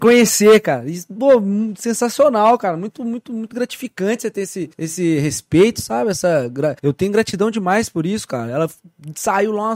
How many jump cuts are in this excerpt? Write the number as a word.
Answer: two